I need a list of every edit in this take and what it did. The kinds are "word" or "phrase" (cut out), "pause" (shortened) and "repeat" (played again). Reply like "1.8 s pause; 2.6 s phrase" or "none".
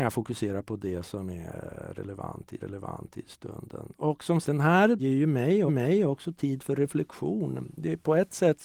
2.6 s repeat; 4.4 s word; 5.0 s word; 5.7 s repeat